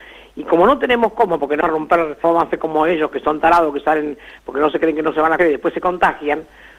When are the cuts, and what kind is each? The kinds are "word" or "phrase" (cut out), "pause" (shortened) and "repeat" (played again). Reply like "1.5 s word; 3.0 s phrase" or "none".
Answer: 1.6 s word; 2.2 s word; 5.4 s word